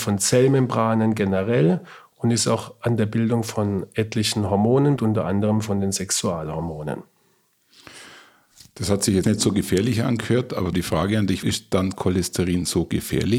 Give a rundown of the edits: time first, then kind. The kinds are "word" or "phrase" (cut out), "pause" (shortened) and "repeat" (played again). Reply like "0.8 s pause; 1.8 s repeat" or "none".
5.0 s word; 9.2 s word; 10.7 s word; 11.4 s word

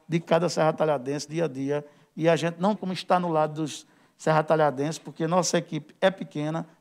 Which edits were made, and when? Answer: 1.3 s word; 2.7 s word

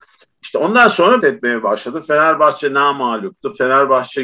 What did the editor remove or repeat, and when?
1.2 s phrase

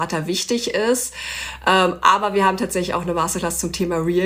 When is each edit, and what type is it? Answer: none

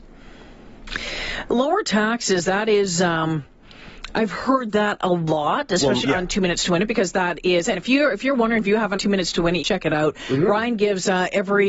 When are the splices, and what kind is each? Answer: 6.0 s word; 7.7 s word; 9.0 s word; 9.6 s word

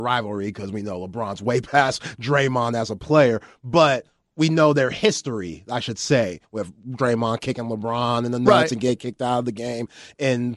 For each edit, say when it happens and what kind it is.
none

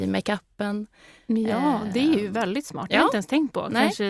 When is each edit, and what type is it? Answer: none

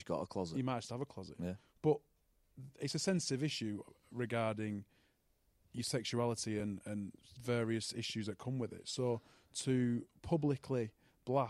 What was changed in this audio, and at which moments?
none

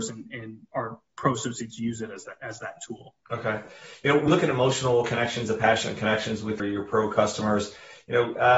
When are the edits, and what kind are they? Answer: 3.2 s pause; 4.3 s word; 6.6 s word

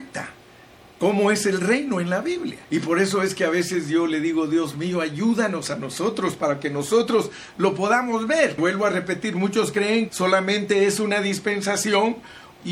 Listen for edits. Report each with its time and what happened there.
2.6 s pause; 8.6 s word; 10.1 s word

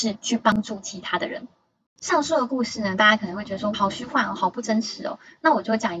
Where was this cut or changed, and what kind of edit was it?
3.7 s word

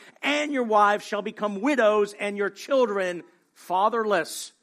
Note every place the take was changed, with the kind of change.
none

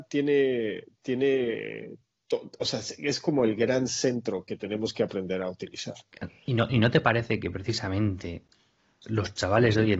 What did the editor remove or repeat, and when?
none

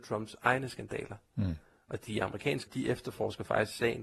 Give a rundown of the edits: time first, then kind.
2.7 s word

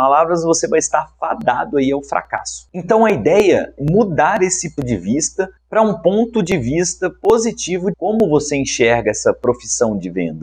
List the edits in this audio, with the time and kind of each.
3.8 s word; 4.8 s word; 5.6 s pause; 7.9 s word

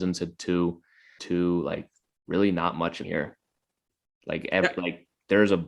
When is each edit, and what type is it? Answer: 1.2 s phrase; 2.1 s pause; 3.0 s word

